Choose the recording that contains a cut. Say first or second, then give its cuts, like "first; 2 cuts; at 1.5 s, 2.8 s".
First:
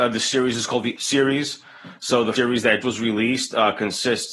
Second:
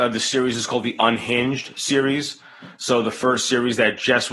first; 3 cuts; at 1.0 s, 2.4 s, 2.8 s